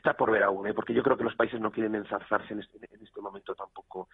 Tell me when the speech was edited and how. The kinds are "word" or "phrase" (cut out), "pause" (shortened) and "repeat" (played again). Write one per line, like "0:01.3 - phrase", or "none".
none

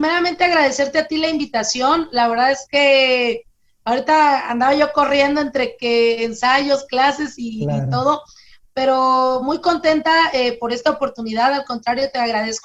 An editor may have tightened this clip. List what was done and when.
none

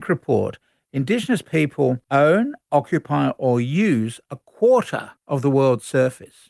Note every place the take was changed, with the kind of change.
0:02.0 - pause
0:05.2 - pause

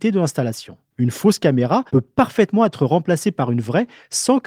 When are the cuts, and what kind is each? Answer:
0:00.9 - pause
0:01.9 - pause

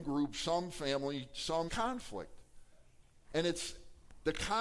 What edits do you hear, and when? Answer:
0:01.7 - phrase

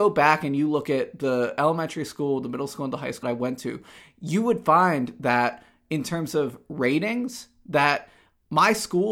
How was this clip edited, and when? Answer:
0:03.2 - word

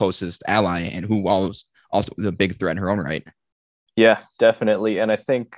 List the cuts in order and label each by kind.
none

